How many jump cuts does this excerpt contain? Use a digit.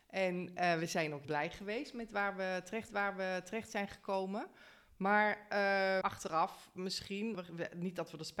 4